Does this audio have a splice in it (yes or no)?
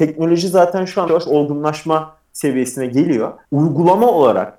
yes